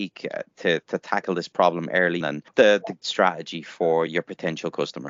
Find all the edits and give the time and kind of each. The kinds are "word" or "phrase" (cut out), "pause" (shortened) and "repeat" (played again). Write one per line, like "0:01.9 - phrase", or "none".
0:02.2 - word
0:02.5 - word
0:03.0 - phrase
0:04.1 - word